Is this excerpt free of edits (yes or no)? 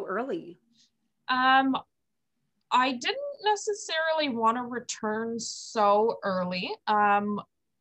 yes